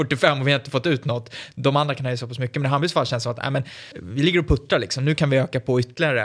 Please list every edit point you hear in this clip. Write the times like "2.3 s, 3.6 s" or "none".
3.9 s